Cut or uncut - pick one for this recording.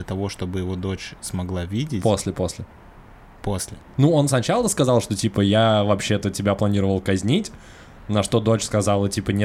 uncut